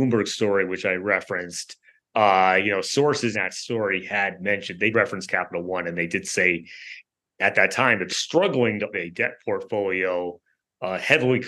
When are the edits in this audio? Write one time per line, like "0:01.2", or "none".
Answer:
0:03.3
0:04.9
0:08.1
0:08.9